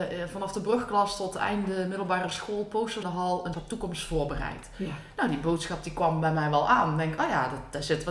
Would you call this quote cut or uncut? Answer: cut